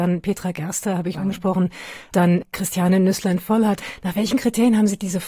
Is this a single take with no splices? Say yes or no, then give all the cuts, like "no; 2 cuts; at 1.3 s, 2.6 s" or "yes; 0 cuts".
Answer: no; 1 cut; at 1.1 s